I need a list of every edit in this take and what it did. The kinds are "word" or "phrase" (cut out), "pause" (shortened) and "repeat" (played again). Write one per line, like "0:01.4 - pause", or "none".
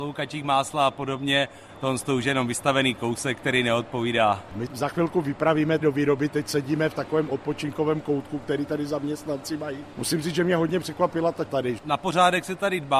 0:04.7 - word
0:05.8 - word
0:11.5 - word